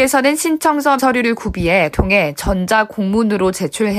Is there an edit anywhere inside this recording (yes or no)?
yes